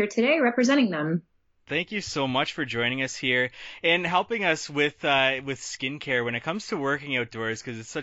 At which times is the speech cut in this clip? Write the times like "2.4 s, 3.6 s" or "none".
none